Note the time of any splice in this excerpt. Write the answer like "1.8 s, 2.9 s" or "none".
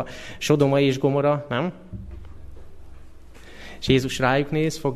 none

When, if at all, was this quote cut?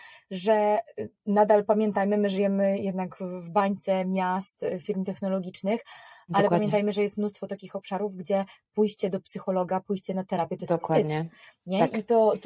none

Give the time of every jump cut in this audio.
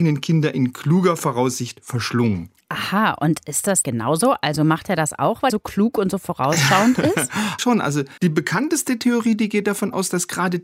3.8 s, 5.5 s, 7.6 s, 8.2 s

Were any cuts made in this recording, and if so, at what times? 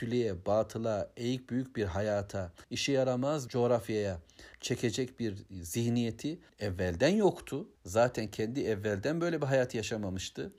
2.6 s, 3.5 s, 4.5 s, 6.5 s, 7.8 s

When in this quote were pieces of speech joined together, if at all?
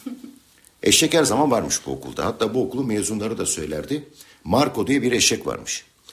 none

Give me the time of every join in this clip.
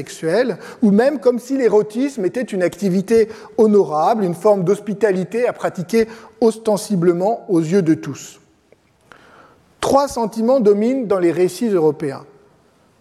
none

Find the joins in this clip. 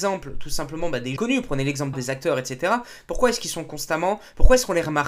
1.2 s, 1.9 s

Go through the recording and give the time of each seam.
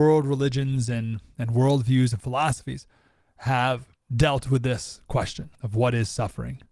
4.0 s, 5.5 s

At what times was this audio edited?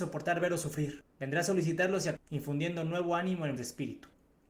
1.1 s, 2.2 s, 3.6 s

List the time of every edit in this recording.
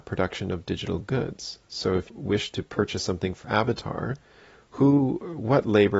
2.1 s, 3.4 s

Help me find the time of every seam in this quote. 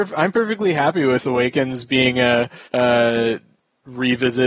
1.2 s, 2.7 s

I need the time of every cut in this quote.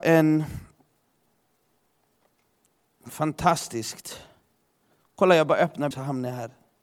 5.9 s

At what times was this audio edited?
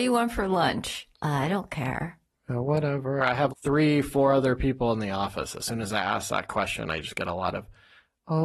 1.1 s, 3.5 s

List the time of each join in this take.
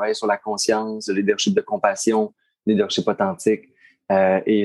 none

